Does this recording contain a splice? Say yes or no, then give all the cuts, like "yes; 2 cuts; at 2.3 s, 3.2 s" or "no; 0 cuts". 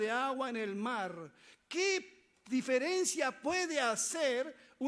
no; 0 cuts